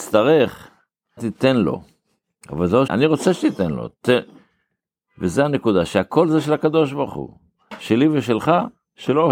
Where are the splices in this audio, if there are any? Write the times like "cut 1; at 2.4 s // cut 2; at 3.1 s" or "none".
cut 1; at 1.2 s // cut 2; at 2.9 s